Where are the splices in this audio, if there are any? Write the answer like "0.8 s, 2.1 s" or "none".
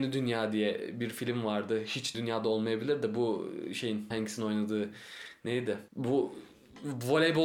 2.1 s, 4.1 s, 5.9 s